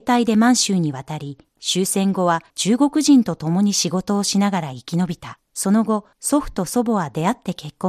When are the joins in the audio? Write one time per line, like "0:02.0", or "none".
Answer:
0:01.5
0:02.5
0:05.5
0:06.1